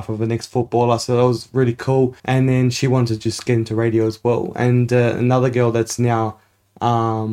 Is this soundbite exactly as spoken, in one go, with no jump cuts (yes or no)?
no